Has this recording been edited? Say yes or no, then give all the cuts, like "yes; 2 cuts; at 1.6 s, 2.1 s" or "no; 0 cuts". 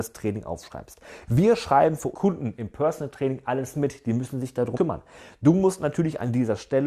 yes; 2 cuts; at 2.1 s, 4.7 s